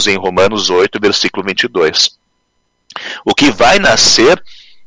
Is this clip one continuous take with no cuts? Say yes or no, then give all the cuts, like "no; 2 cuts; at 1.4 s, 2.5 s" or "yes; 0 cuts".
yes; 0 cuts